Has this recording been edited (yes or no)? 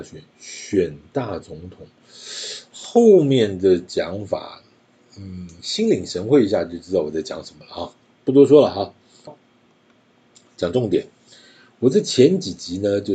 yes